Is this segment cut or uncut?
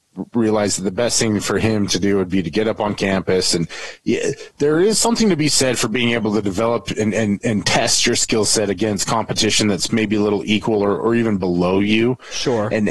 uncut